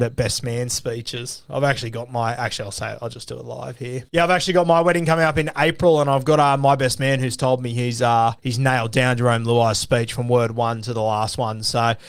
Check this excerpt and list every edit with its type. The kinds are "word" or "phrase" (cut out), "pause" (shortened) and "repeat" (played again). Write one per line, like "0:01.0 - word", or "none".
0:04.1 - pause
0:08.4 - pause

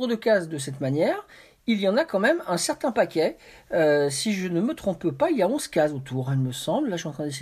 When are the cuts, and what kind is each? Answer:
none

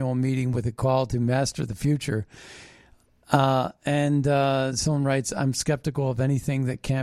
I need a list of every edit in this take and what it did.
none

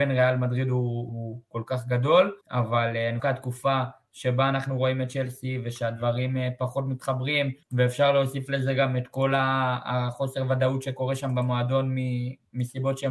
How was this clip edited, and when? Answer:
0:01.1 - word
0:02.4 - pause
0:03.2 - phrase
0:07.6 - pause

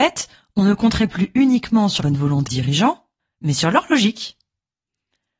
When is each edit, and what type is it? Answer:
0:02.0 - word
0:02.5 - word

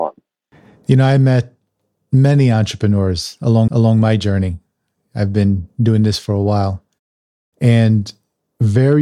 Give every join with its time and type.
0:03.7 - repeat

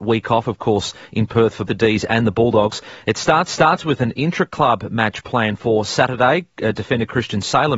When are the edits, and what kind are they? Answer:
0:01.7 - word
0:03.5 - repeat

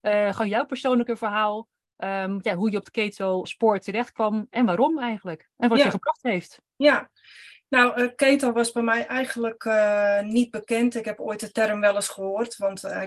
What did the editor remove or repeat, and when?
0:03.4 - word

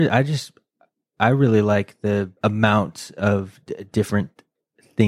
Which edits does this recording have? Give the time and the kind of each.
0:02.4 - pause

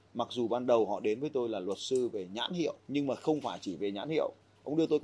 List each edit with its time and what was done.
0:02.8 - pause

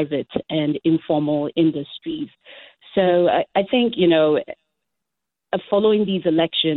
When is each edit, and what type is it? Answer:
0:03.5 - word

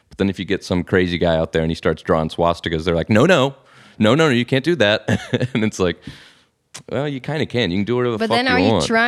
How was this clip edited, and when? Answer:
none

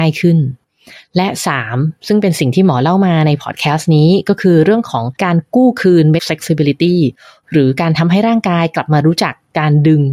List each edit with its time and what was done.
0:05.1 - pause
0:06.2 - word

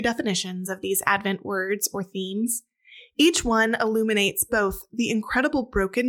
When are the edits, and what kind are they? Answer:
none

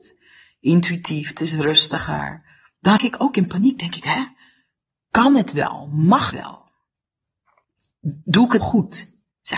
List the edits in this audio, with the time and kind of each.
0:03.0 - word
0:06.3 - word
0:08.6 - word

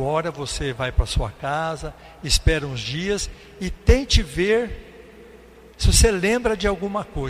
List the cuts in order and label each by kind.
0:05.7 - pause

